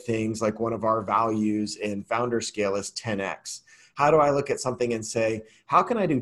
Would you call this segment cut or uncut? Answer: uncut